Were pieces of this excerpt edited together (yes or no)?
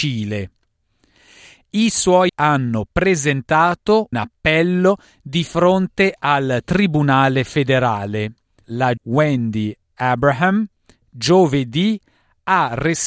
yes